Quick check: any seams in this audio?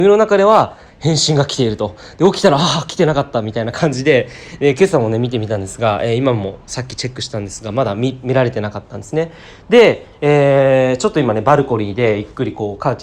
no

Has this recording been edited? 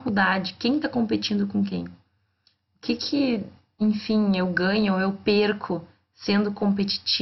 no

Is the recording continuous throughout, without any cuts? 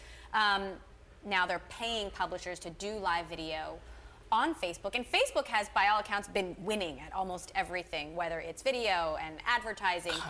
yes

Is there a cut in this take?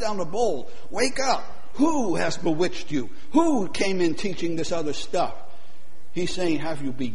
no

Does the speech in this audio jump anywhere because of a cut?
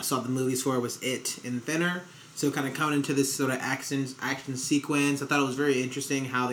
no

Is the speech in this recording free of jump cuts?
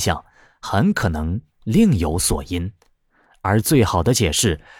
yes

